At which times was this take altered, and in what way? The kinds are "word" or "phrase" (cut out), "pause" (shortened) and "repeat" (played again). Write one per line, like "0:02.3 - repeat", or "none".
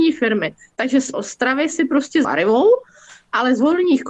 0:01.1 - phrase
0:02.2 - phrase